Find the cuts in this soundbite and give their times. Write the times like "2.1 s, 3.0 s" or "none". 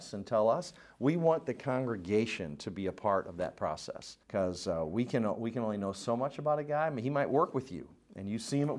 4.2 s